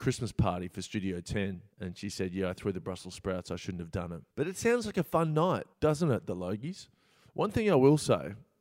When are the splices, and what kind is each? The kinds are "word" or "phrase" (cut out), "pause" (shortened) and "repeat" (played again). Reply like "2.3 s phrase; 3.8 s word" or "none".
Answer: 1.7 s pause; 4.3 s pause; 5.7 s pause